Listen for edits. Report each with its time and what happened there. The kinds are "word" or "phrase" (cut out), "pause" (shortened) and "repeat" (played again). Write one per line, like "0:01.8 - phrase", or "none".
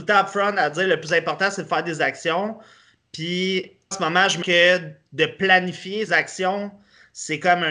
0:03.9 - word
0:04.4 - phrase
0:06.1 - word